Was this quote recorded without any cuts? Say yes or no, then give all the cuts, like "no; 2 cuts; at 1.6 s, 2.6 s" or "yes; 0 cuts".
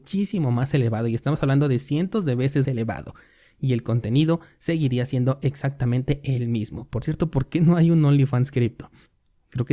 no; 1 cut; at 2.6 s